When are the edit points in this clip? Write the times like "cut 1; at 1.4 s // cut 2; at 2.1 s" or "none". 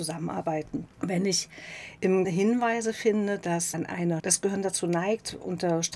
cut 1; at 0.9 s // cut 2; at 2.2 s // cut 3; at 3.7 s // cut 4; at 4.2 s